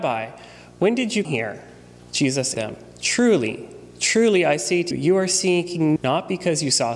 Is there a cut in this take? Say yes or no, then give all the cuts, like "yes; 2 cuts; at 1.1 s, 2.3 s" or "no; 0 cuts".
yes; 4 cuts; at 1.2 s, 2.5 s, 4.9 s, 6.0 s